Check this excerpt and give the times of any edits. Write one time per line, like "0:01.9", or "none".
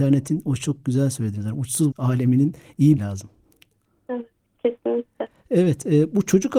0:01.9
0:03.0